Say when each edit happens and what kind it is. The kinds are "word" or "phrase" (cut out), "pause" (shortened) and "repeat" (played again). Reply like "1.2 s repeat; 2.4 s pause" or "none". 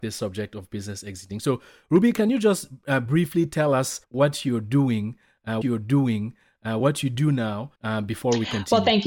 4.0 s pause; 5.6 s repeat; 7.8 s pause